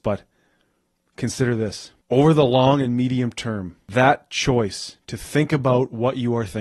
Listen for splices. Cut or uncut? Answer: uncut